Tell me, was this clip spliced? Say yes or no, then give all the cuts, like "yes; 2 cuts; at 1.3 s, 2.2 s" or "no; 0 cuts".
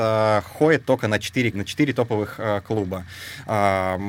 yes; 1 cut; at 1.5 s